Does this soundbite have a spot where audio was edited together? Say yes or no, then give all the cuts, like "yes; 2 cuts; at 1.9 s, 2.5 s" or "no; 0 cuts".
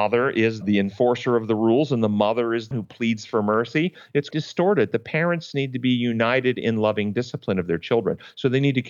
yes; 2 cuts; at 2.7 s, 4.3 s